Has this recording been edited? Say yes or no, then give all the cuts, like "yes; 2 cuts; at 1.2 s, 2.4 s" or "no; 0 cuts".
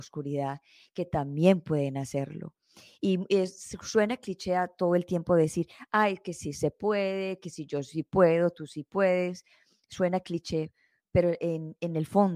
no; 0 cuts